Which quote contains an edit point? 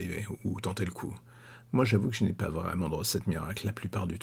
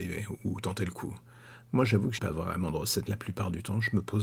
second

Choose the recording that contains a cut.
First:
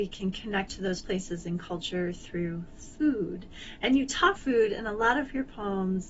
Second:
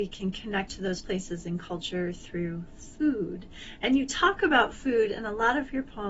first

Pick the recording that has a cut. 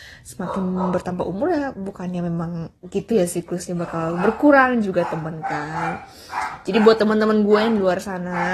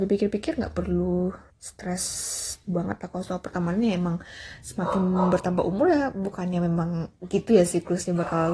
second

